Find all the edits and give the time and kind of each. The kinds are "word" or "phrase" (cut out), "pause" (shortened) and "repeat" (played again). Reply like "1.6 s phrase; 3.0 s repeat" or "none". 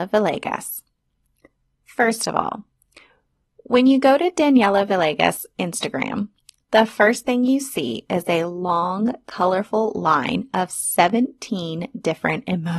none